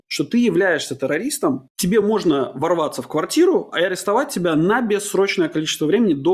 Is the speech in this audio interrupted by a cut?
no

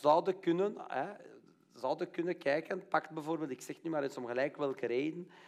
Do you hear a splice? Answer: no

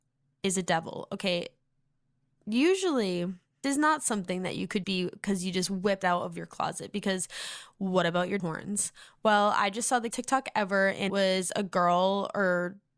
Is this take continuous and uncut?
no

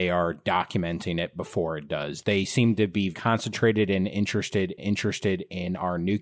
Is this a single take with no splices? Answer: no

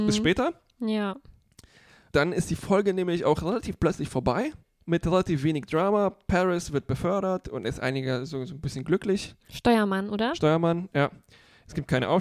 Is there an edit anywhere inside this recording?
yes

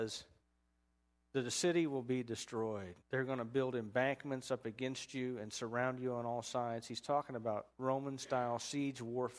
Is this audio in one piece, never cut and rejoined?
no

